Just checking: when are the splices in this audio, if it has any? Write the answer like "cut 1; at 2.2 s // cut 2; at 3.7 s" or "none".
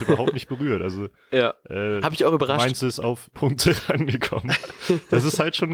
cut 1; at 3.3 s